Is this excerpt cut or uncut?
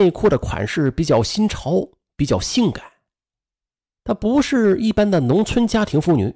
uncut